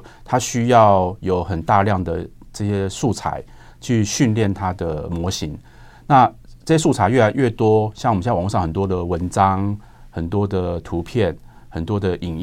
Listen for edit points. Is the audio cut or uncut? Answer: uncut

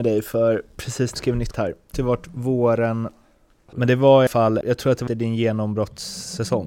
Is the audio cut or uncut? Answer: cut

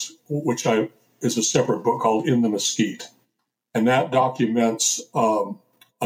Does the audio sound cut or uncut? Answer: cut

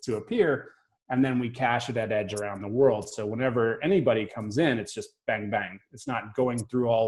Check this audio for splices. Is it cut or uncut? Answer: uncut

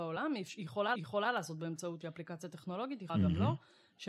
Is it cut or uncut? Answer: cut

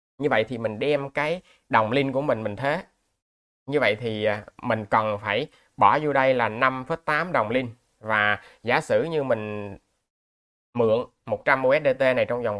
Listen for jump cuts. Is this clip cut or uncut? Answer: uncut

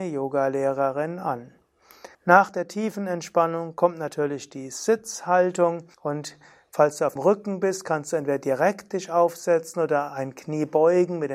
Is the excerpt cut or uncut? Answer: cut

